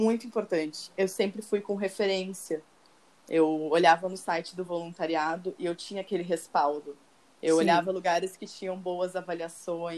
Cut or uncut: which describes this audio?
uncut